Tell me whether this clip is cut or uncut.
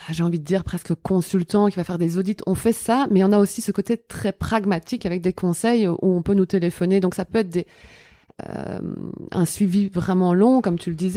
uncut